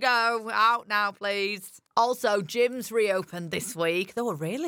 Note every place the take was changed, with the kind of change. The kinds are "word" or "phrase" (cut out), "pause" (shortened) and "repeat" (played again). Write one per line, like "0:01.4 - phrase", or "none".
0:01.9 - pause